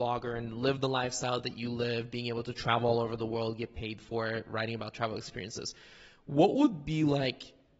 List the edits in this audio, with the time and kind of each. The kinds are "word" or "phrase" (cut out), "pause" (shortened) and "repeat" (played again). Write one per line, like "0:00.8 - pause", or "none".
none

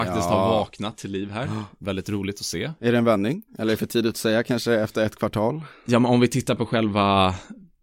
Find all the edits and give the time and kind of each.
0:03.5 - pause

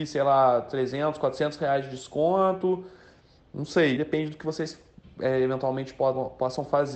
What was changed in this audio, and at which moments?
0:04.0 - word

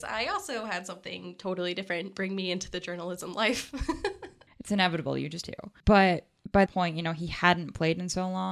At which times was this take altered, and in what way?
0:05.4 - word
0:06.7 - word

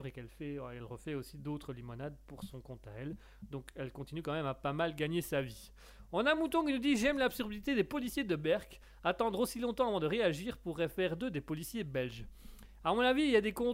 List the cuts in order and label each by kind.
none

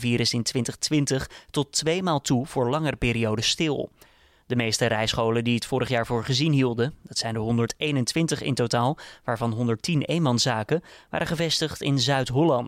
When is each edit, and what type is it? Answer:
none

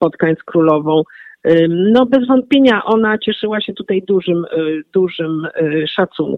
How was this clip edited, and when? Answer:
none

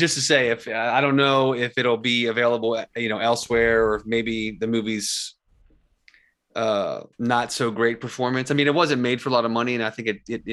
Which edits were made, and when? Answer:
0:07.1 - pause

